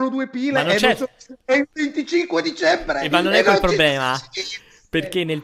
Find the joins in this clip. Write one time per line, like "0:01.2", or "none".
none